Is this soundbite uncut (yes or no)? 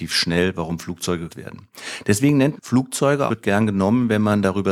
no